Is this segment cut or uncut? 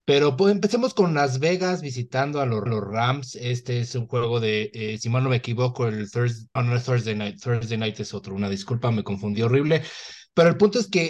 cut